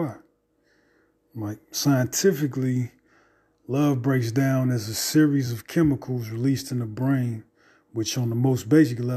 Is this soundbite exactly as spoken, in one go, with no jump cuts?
yes; 0 cuts

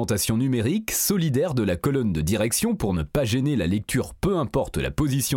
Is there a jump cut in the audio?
no; 0 cuts

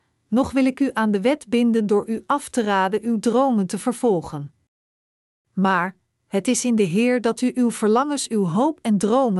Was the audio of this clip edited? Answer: no; 0 cuts

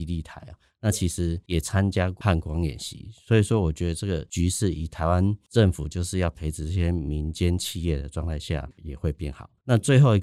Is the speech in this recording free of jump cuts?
no; 1 cut; at 8.7 s

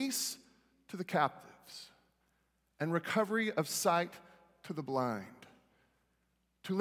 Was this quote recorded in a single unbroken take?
yes; 0 cuts

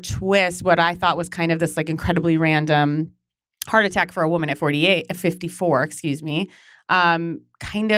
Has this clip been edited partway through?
no; 0 cuts

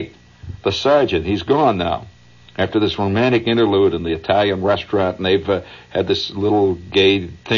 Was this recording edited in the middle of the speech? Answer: no; 0 cuts

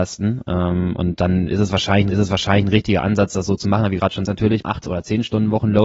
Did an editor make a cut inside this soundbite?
yes; 3 cuts; at 2.1 s, 4.3 s, 4.6 s

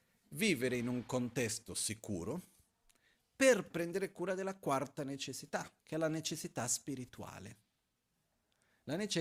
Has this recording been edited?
yes; 2 cuts; at 3.7 s, 5.8 s

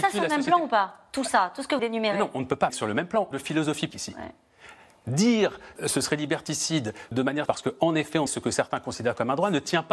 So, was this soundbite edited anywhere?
yes; 8 cuts; at 1.8 s, 2.7 s, 3.3 s, 3.9 s, 5.8 s, 7.1 s, 7.5 s, 8.3 s

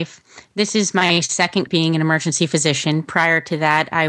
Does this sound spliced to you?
yes; 1 cut; at 1.7 s

